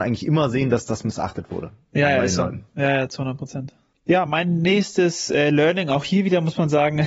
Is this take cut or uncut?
uncut